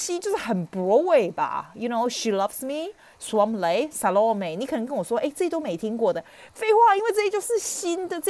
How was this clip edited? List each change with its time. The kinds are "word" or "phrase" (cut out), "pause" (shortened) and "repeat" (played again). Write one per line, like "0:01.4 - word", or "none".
none